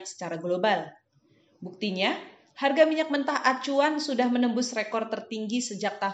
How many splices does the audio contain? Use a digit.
0